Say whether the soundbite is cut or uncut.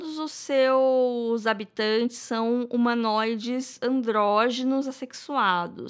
uncut